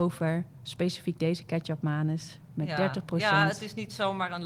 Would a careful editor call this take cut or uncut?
uncut